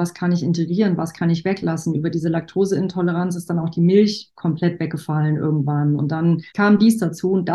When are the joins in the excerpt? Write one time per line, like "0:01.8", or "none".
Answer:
0:06.5